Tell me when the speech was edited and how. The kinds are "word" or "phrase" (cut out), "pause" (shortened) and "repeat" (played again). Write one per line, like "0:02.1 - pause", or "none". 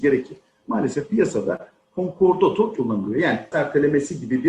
0:02.8 - word
0:03.5 - word